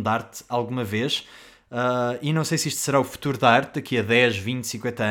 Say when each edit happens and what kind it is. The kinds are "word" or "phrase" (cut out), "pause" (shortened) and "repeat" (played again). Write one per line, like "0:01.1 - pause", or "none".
none